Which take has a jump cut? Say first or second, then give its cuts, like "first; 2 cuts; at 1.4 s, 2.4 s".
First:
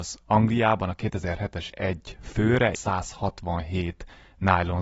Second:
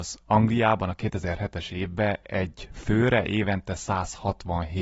first; 2 cuts; at 1.7 s, 2.7 s